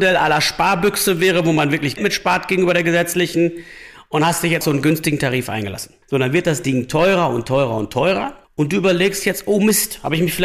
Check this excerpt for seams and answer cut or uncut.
cut